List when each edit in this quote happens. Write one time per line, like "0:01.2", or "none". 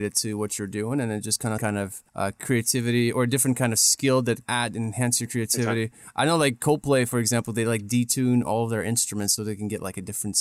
0:01.6
0:02.1
0:04.4
0:09.4

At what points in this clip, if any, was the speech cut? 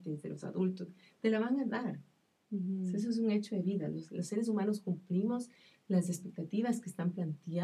none

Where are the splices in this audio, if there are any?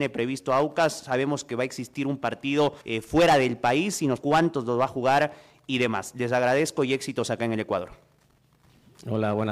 0:02.8
0:04.2

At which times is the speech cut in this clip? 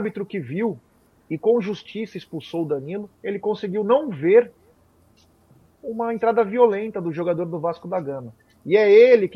0:03.1

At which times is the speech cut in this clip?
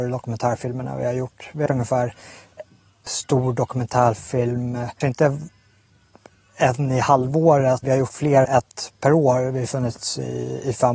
0:01.7
0:03.1
0:05.0
0:07.8
0:08.4

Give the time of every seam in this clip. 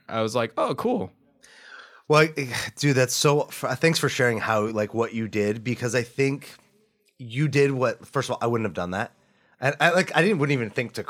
none

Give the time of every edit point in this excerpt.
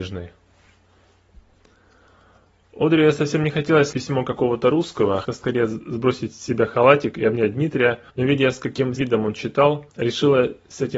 0:03.9
0:05.2
0:08.1
0:09.0
0:09.9

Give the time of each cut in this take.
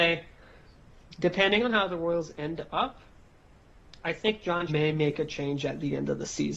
0:04.7

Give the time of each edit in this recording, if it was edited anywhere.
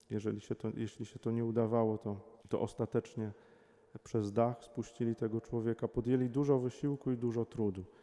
0:02.4

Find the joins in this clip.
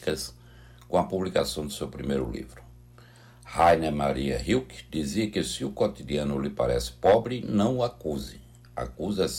none

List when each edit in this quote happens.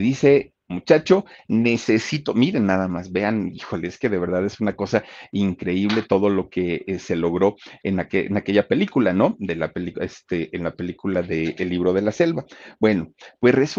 none

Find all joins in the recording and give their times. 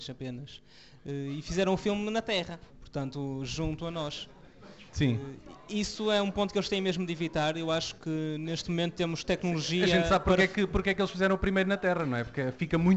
0:02.7
0:04.9

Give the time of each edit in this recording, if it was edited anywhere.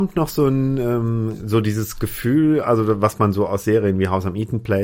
none

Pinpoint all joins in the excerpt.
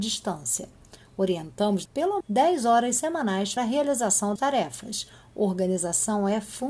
0:01.9
0:02.2
0:03.6
0:04.4

